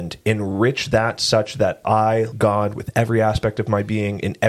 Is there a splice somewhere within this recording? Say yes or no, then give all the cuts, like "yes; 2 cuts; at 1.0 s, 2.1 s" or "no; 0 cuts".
yes; 1 cut; at 2.3 s